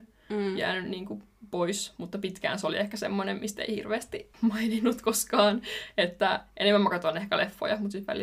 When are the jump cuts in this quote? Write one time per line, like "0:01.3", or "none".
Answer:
0:04.3